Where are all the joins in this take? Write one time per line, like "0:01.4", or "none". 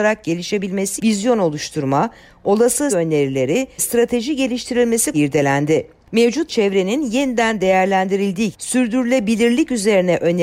0:01.0
0:02.9
0:03.8
0:05.1
0:06.5
0:08.5